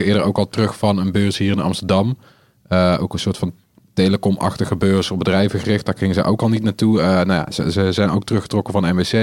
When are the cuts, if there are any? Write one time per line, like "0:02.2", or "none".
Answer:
none